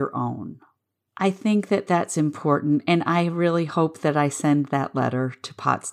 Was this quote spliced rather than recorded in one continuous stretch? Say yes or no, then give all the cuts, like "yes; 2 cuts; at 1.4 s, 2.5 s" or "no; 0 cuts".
no; 0 cuts